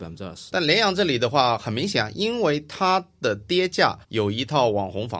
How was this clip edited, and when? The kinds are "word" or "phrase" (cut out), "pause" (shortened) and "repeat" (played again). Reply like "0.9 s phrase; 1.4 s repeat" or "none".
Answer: 4.0 s pause